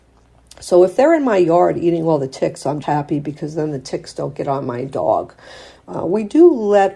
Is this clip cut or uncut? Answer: cut